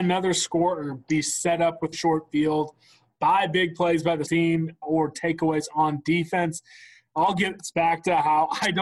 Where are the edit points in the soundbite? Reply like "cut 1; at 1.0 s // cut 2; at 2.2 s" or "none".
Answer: cut 1; at 1.9 s // cut 2; at 4.3 s // cut 3; at 4.8 s